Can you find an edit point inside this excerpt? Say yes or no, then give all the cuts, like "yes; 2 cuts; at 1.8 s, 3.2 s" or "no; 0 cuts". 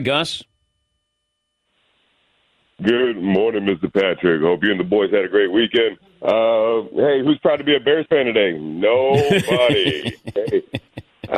yes; 1 cut; at 6.1 s